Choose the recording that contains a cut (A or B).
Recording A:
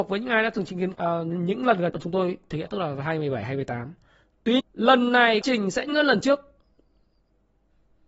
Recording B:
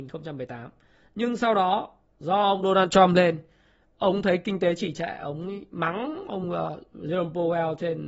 A